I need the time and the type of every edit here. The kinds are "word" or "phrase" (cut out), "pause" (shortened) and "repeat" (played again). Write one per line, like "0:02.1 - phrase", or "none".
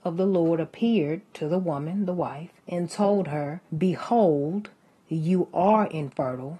0:02.6 - pause
0:03.7 - pause